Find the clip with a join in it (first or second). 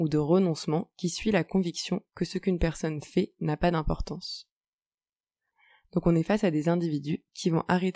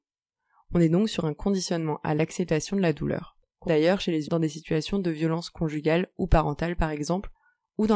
second